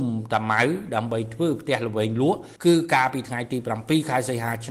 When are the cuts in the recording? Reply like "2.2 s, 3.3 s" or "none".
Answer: 2.6 s